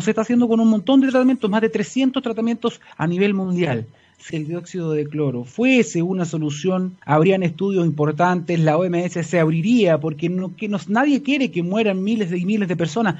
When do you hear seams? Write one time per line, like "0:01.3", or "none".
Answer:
0:02.9
0:04.3
0:07.0